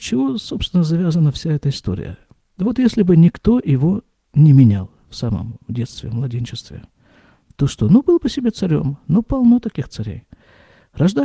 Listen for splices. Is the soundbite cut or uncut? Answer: uncut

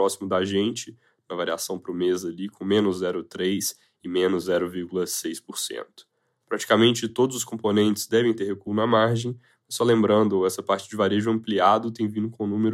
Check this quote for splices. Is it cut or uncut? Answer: uncut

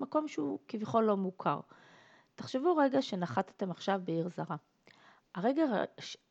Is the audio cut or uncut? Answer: uncut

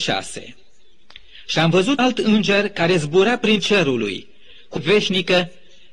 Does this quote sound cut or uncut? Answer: cut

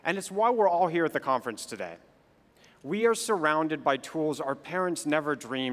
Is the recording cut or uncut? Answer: uncut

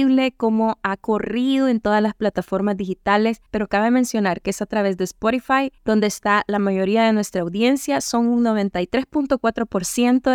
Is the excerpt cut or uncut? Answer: cut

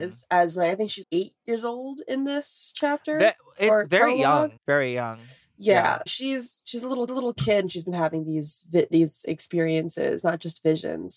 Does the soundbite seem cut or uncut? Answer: cut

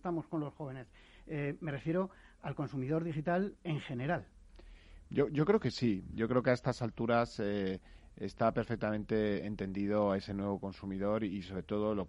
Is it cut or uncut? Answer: cut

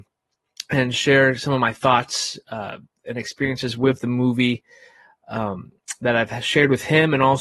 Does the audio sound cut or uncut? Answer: uncut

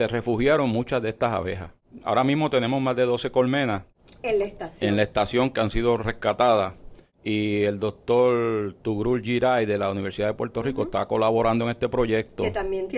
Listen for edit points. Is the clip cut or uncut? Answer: uncut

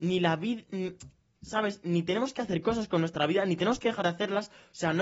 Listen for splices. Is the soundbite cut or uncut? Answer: uncut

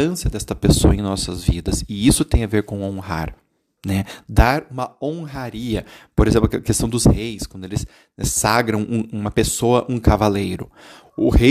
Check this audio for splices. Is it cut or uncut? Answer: uncut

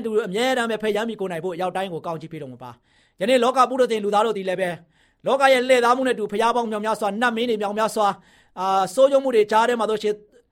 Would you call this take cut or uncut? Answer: uncut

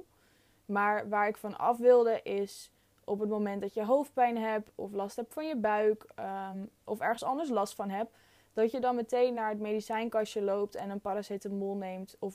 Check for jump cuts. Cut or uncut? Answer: uncut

